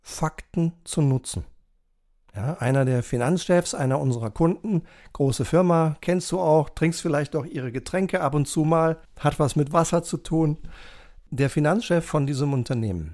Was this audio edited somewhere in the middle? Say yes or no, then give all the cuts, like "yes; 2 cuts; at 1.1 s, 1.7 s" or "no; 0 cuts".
no; 0 cuts